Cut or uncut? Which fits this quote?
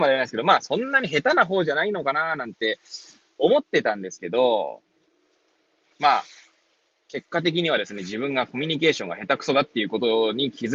uncut